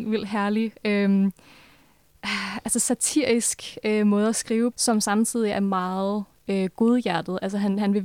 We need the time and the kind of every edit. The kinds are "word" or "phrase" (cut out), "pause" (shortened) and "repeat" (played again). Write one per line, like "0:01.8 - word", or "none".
0:04.7 - word

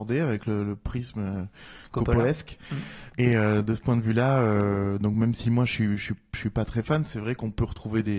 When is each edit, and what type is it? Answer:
none

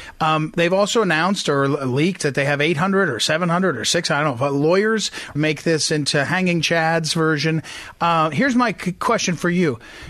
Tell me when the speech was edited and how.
0:05.4 - phrase

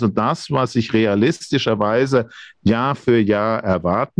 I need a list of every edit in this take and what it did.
none

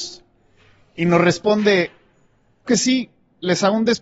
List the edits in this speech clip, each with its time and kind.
0:02.7 - word

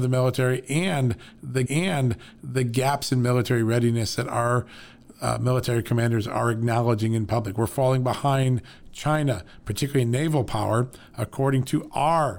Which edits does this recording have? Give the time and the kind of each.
0:01.7 - repeat

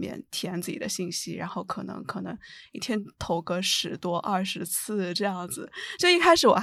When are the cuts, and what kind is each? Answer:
none

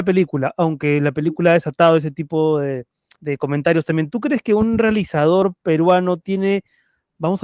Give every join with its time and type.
0:03.2 - pause

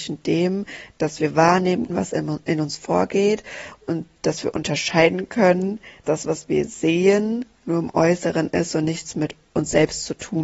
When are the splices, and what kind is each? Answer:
0:01.9 - word
0:06.0 - word
0:07.6 - pause

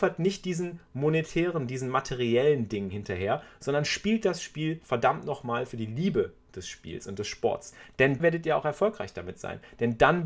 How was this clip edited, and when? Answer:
0:08.2 - word

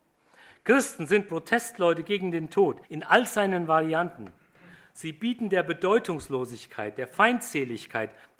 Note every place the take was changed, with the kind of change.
0:02.8 - pause

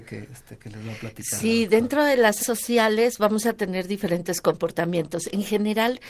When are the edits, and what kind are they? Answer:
0:02.4 - word

